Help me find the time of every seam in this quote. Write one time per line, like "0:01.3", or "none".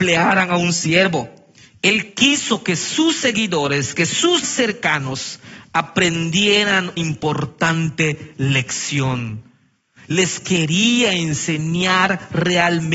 0:04.4
0:07.0